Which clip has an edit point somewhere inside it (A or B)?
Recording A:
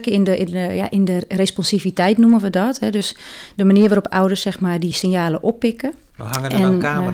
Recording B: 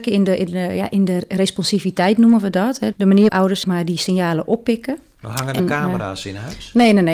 B